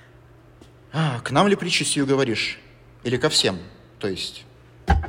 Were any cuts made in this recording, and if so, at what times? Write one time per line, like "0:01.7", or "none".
none